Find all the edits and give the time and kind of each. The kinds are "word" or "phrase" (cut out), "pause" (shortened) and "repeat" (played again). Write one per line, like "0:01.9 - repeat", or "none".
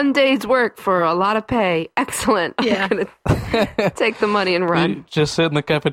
none